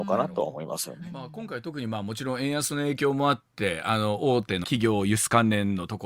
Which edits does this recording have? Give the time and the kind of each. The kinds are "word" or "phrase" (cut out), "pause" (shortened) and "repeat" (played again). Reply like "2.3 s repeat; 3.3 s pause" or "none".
4.6 s word